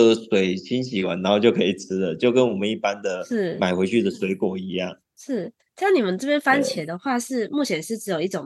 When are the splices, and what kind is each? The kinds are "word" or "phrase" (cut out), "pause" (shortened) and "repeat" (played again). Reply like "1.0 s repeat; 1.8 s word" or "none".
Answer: 5.0 s pause